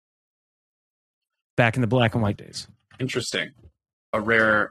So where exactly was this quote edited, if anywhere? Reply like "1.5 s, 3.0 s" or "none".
2.3 s